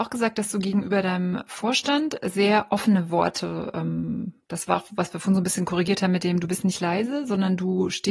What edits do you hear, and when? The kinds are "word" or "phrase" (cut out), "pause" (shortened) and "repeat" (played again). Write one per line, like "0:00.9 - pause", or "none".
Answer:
none